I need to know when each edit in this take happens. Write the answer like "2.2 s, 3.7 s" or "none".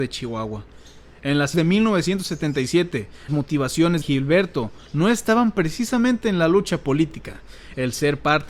1.5 s, 3.3 s, 4.0 s